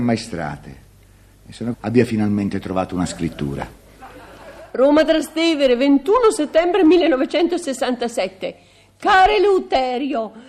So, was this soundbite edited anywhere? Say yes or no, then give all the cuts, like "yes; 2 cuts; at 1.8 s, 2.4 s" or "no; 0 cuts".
yes; 1 cut; at 1.7 s